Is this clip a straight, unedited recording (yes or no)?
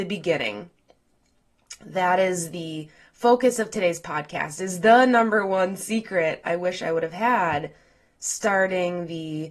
yes